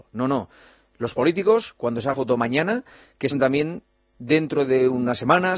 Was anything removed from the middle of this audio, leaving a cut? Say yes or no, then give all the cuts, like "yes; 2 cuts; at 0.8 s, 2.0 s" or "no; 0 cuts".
yes; 2 cuts; at 2.1 s, 3.3 s